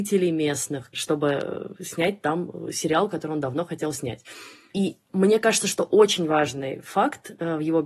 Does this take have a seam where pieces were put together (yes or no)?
no